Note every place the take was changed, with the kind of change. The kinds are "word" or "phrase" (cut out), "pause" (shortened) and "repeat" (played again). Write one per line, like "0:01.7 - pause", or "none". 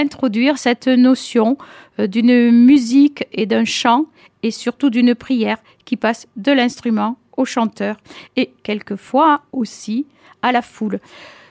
none

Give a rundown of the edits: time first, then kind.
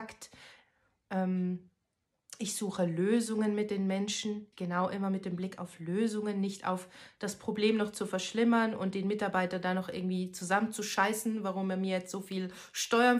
0:04.5 - pause

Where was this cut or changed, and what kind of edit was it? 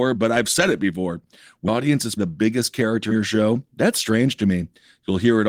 0:01.7 - word
0:02.2 - word
0:03.1 - word

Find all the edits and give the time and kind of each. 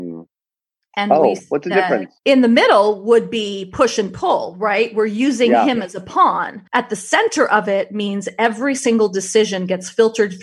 0:02.2 - pause
0:06.7 - pause

